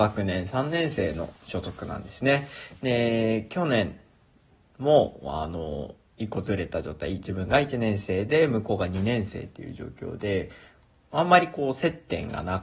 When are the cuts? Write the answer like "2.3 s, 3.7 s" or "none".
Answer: 1.4 s